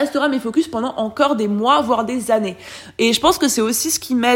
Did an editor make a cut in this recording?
no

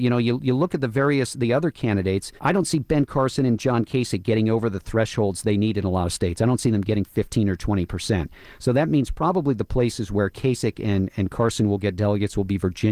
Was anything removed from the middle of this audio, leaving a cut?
yes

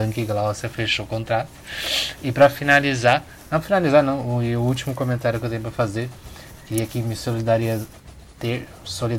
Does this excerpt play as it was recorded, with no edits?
yes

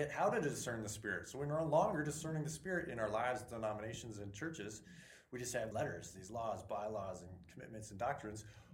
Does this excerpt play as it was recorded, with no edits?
no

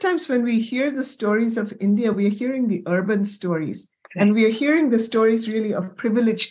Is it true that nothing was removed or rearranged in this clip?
yes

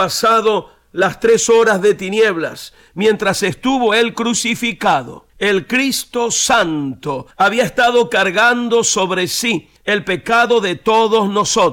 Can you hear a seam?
yes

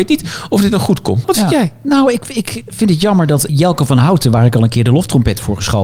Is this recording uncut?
yes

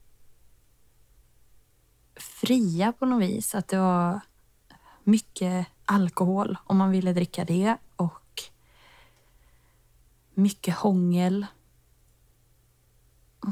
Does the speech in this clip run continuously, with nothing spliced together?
yes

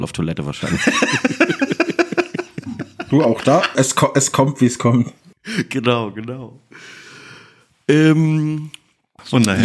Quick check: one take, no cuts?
no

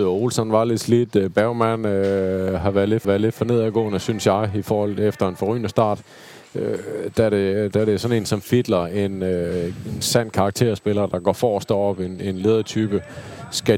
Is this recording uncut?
no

